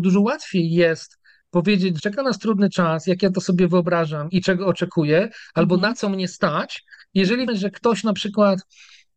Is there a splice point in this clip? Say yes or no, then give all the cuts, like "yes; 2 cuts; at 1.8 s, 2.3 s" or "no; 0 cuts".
yes; 3 cuts; at 2.0 s, 4.3 s, 7.5 s